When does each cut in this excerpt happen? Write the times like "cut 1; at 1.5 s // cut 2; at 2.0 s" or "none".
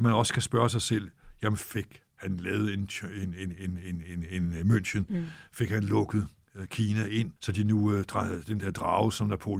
cut 1; at 2.1 s // cut 2; at 7.4 s